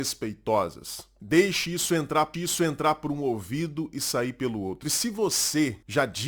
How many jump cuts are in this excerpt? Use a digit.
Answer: 1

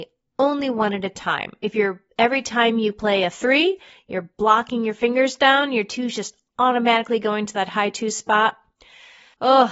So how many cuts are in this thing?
1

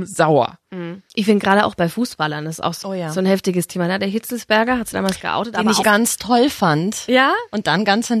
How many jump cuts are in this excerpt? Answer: 4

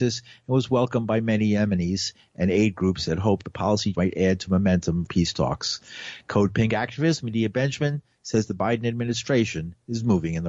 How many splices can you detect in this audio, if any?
2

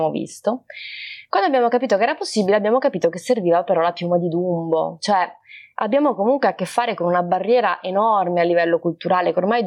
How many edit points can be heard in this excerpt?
0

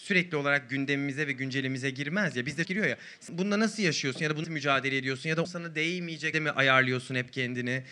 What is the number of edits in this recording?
4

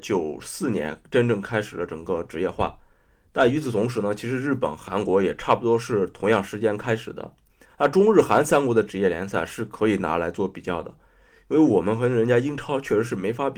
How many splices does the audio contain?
0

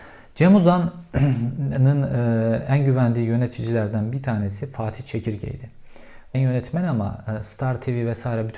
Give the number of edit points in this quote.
1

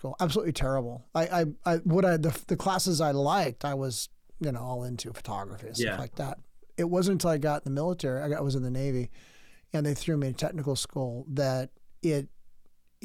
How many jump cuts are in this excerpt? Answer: 0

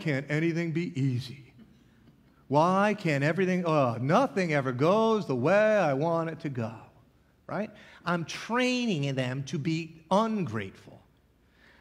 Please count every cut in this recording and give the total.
0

